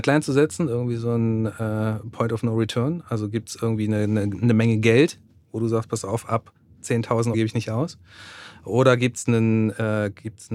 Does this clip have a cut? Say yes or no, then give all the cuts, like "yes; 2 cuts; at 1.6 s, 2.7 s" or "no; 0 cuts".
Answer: yes; 1 cut; at 7.3 s